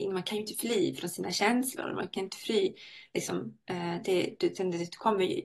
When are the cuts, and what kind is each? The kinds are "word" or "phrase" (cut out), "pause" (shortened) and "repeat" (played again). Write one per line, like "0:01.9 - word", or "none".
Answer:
none